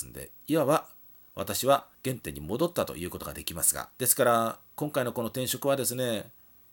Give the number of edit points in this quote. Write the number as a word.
three